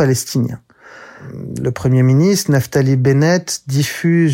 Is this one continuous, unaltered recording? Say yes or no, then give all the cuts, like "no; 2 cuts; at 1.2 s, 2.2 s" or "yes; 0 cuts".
yes; 0 cuts